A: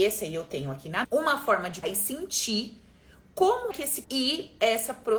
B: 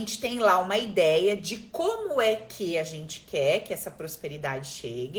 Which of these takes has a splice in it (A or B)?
A